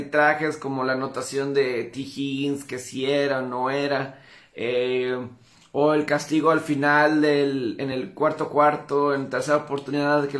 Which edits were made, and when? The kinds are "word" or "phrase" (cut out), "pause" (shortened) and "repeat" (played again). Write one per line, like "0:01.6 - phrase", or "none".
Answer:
none